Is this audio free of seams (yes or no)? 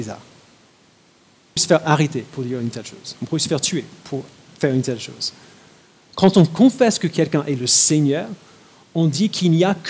no